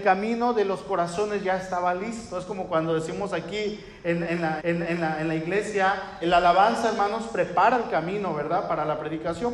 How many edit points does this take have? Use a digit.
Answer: 2